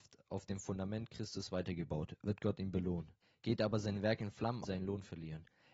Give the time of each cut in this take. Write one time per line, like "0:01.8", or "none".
0:03.2
0:04.6

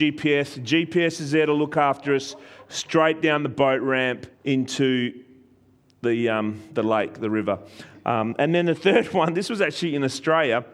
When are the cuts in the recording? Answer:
0:04.3

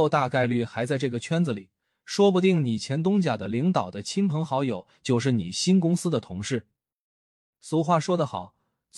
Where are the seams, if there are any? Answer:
none

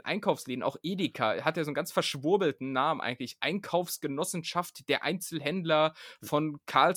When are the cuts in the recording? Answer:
none

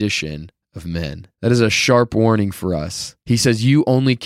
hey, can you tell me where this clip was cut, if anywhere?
0:01.3
0:03.2

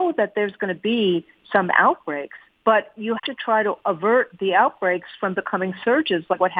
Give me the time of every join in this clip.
0:02.5
0:03.2

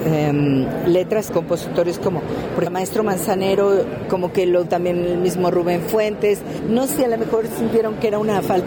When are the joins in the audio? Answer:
0:01.3
0:02.7
0:04.7
0:06.9

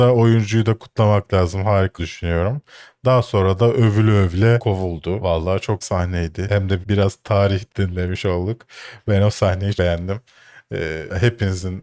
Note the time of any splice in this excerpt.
0:02.0
0:05.8
0:06.8
0:07.7
0:09.7

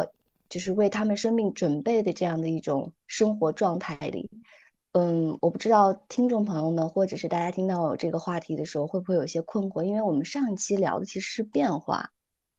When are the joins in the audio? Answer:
none

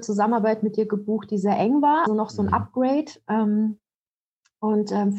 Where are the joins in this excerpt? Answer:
0:02.1

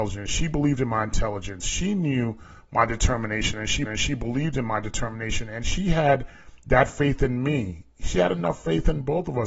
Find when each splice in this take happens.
0:03.8

